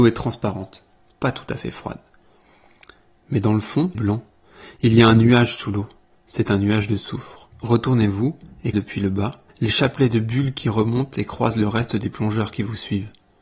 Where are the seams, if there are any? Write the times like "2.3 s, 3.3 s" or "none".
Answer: 3.9 s, 7.5 s, 8.7 s, 9.5 s